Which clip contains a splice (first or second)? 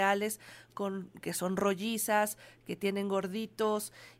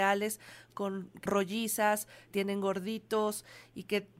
second